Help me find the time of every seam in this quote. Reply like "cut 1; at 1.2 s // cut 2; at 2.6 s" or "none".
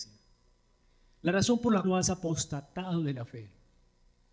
cut 1; at 1.8 s

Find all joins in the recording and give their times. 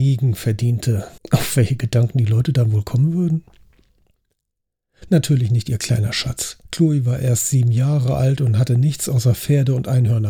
cut 1; at 1.2 s // cut 2; at 6.6 s

